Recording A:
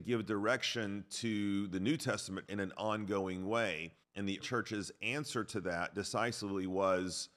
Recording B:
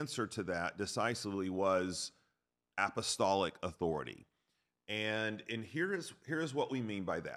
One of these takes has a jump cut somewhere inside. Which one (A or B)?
A